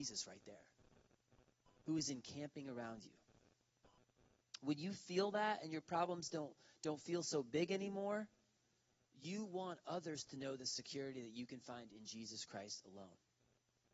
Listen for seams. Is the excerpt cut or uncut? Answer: uncut